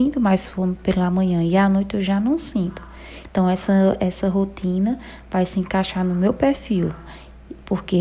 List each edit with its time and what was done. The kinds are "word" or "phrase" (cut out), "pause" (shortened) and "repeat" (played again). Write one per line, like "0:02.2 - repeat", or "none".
none